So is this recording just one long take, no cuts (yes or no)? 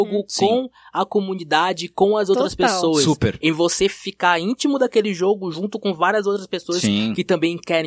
yes